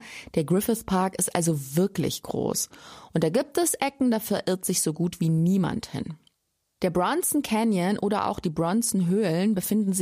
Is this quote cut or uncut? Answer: uncut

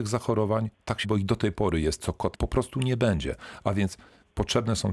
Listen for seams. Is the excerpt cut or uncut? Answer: cut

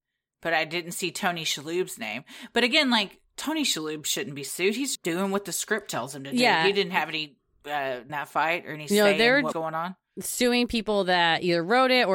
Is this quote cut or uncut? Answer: cut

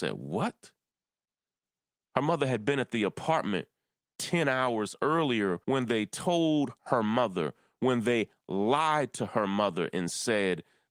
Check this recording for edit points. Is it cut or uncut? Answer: cut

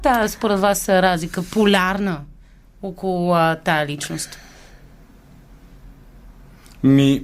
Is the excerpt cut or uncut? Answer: uncut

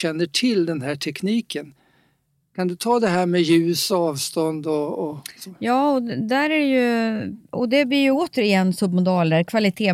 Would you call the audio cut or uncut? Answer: uncut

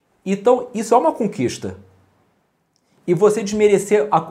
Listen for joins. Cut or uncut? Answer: uncut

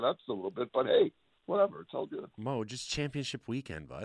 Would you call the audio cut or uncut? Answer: uncut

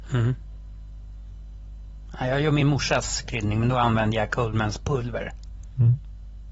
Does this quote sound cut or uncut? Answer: uncut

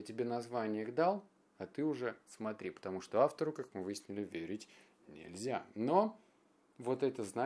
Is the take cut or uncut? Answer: uncut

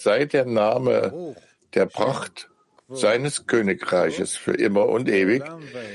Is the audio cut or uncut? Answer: uncut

